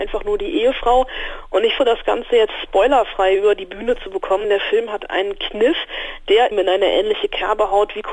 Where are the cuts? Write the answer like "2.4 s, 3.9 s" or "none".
1.8 s, 4.4 s, 6.5 s